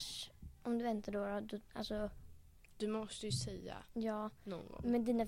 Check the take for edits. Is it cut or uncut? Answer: uncut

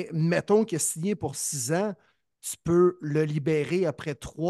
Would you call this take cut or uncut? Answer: uncut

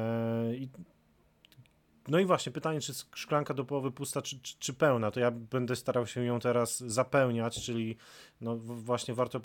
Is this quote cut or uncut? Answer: uncut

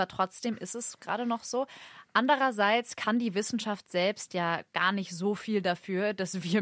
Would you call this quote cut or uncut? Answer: uncut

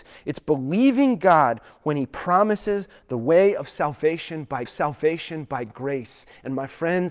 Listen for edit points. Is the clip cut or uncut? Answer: cut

